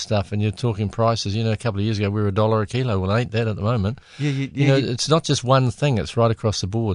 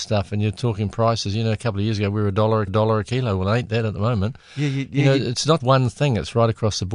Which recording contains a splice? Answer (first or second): second